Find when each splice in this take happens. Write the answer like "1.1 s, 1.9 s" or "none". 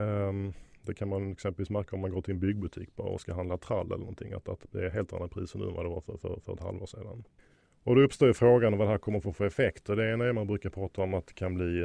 7.4 s